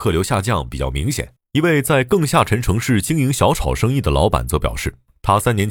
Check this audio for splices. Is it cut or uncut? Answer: cut